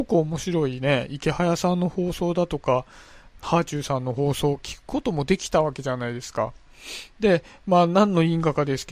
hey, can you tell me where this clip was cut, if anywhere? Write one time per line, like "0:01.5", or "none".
0:03.4